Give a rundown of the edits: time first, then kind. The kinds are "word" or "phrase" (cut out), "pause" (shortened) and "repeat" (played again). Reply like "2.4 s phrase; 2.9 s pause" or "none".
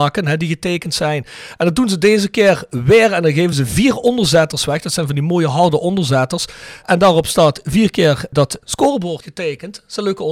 none

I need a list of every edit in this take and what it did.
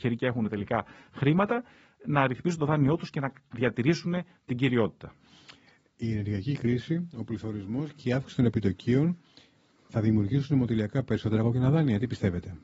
none

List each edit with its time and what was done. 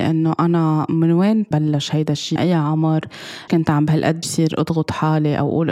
1.5 s word; 2.4 s word; 3.5 s word; 4.2 s word

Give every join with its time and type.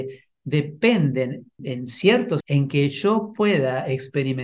1.6 s word; 2.4 s word

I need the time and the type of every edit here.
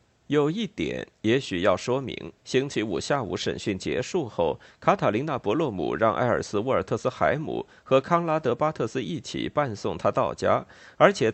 2.4 s pause

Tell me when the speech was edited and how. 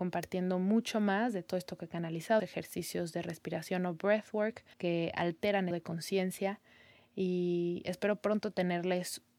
2.4 s word; 4.7 s pause; 5.7 s phrase

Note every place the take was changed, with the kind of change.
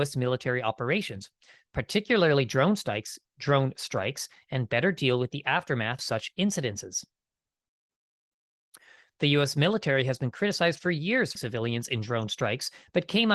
6.0 s word; 11.4 s phrase

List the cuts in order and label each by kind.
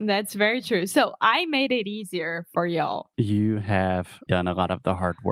3.1 s pause; 4.3 s word

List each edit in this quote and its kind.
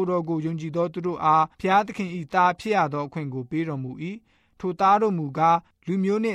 1.5 s pause

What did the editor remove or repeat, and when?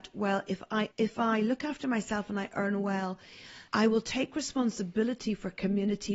0.9 s pause; 3.7 s pause

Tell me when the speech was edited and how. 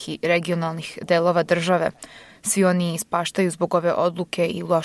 none

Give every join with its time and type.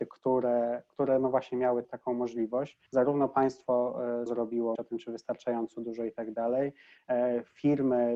1.8 s word; 2.9 s pause; 4.3 s word; 4.8 s phrase

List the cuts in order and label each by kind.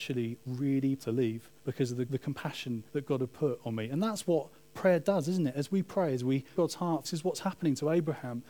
1.0 s word; 1.6 s pause; 2.1 s word; 2.9 s pause; 6.6 s word; 7.0 s phrase

